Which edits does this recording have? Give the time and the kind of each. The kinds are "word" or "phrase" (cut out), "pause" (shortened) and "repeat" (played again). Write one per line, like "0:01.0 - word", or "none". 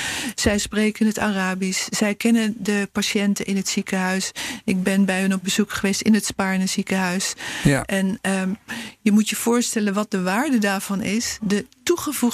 none